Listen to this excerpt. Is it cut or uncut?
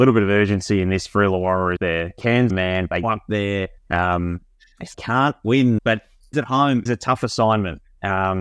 cut